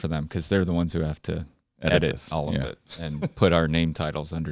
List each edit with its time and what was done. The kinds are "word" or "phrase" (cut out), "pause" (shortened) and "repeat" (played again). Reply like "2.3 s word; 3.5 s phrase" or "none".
none